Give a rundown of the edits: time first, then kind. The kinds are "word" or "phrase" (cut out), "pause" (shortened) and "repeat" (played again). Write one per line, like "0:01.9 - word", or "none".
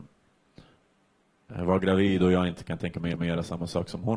0:03.1 - repeat